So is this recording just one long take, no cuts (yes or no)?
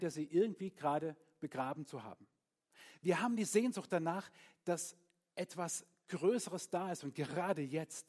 yes